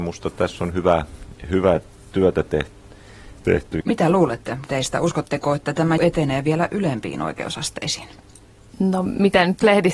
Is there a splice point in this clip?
yes; 2 cuts; at 4.7 s, 6.0 s

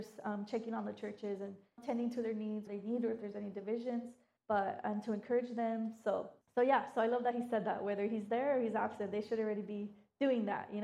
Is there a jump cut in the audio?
yes; 4 cuts; at 1.8 s, 2.7 s, 4.4 s, 6.4 s

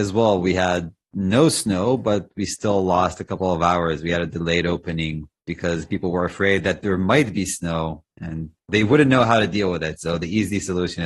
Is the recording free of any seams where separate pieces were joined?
yes; 0 cuts

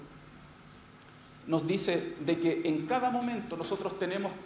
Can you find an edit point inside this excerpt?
no; 0 cuts

